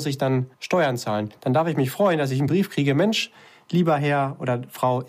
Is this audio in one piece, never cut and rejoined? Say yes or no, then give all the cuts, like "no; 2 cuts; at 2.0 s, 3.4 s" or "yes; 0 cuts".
yes; 0 cuts